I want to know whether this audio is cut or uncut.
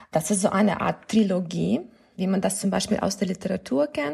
uncut